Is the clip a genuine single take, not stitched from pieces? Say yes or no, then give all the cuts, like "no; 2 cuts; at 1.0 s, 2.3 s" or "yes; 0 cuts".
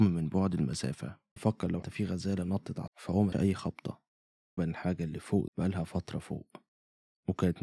no; 6 cuts; at 1.4 s, 1.8 s, 2.9 s, 3.3 s, 4.6 s, 5.5 s